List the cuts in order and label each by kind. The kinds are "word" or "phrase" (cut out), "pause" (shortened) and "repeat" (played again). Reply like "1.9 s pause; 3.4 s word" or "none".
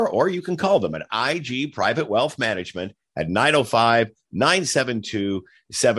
none